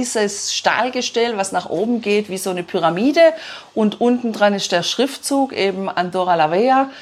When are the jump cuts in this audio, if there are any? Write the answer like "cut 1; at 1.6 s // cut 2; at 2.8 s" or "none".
none